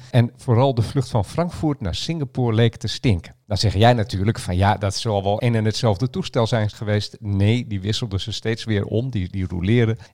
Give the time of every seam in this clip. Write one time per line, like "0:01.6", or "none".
none